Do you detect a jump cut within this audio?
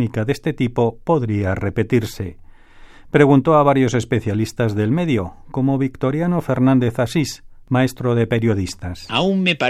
no; 0 cuts

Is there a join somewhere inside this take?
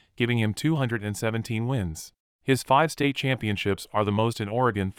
yes; 1 cut; at 2.2 s

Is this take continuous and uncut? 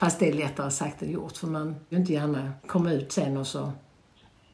no; 2 cuts; at 1.9 s, 2.6 s

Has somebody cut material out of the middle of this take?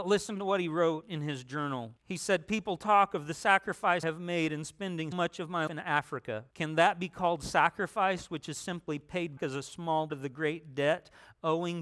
yes; 7 cuts; at 2.0 s, 4.0 s, 5.1 s, 5.7 s, 6.5 s, 9.4 s, 10.1 s

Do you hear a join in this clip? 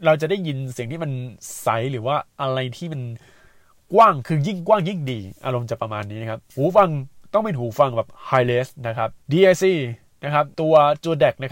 yes; 4 cuts; at 2.3 s, 6.5 s, 9.2 s, 10.5 s

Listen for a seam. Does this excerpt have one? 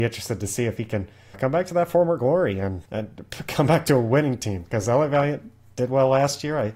yes; 2 cuts; at 1.3 s, 2.8 s

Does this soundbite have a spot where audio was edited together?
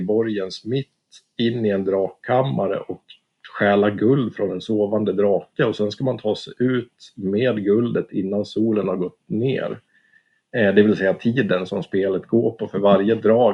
no; 0 cuts

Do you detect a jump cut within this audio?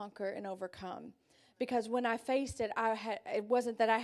no; 0 cuts

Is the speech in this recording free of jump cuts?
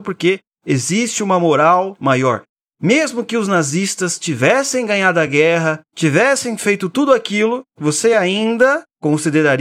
yes; 0 cuts

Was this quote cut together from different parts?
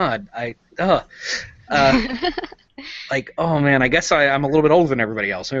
no; 0 cuts

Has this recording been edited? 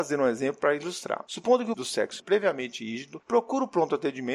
yes; 2 cuts; at 1.7 s, 2.2 s

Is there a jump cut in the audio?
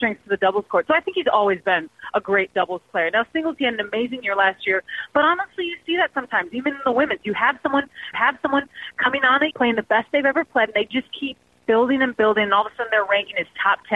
yes; 2 cuts; at 8.1 s, 9.5 s

